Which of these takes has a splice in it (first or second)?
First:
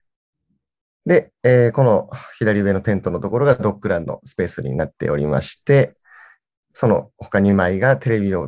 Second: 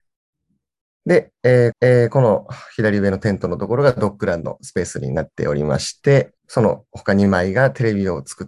second